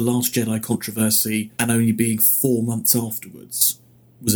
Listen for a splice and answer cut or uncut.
cut